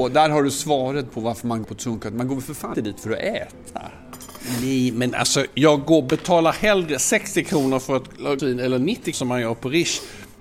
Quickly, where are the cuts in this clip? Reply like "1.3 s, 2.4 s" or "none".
1.6 s, 2.7 s, 8.4 s, 9.1 s